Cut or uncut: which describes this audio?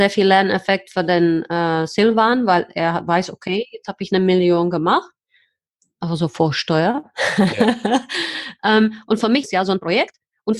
uncut